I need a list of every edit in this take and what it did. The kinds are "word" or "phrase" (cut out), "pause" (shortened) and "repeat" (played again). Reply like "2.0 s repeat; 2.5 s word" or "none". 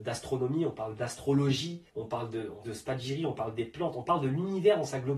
1.9 s pause; 2.6 s word